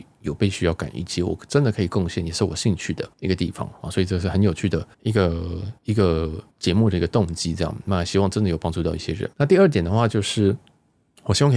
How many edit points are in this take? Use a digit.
5